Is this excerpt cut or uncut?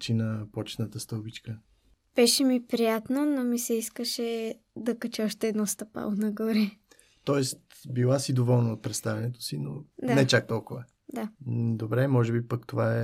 cut